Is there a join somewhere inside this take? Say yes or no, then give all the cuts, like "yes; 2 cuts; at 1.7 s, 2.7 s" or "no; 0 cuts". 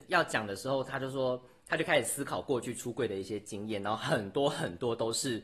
no; 0 cuts